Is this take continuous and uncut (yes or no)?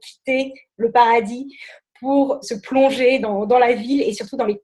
no